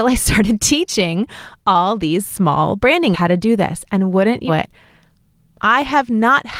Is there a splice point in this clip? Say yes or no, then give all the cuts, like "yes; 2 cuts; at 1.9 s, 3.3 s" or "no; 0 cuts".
yes; 2 cuts; at 3.1 s, 4.5 s